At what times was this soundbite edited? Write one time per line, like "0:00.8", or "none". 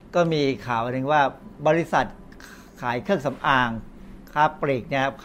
none